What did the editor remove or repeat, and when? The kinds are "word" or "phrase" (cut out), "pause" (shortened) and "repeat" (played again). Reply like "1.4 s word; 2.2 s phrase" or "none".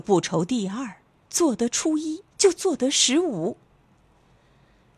1.1 s pause; 2.3 s pause